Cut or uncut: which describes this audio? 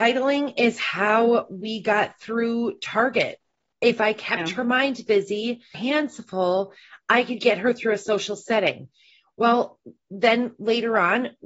cut